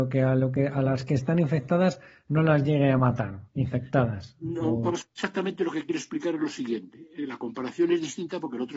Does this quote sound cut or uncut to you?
uncut